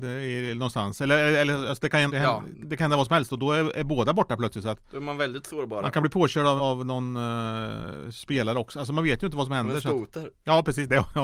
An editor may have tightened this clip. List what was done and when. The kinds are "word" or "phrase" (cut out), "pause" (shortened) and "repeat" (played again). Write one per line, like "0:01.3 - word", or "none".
0:02.1 - word
0:06.6 - word